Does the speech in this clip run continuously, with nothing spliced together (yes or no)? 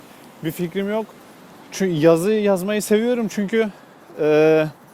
yes